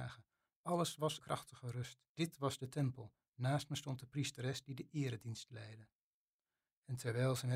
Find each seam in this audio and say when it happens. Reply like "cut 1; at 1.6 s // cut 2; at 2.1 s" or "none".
cut 1; at 1.2 s // cut 2; at 2.1 s